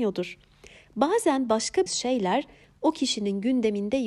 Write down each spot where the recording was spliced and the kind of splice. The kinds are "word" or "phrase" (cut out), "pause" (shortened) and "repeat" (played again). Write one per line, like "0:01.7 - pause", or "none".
0:01.9 - phrase